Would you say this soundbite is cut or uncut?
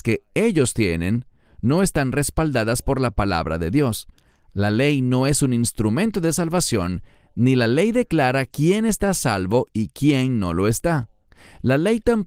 uncut